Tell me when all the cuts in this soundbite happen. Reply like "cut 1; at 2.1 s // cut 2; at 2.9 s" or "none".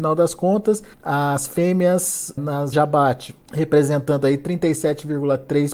cut 1; at 0.9 s // cut 2; at 2.4 s // cut 3; at 2.7 s // cut 4; at 3.4 s